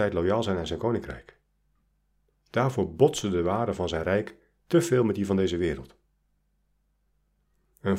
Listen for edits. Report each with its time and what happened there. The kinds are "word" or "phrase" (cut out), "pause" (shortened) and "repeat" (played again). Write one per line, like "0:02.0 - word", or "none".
none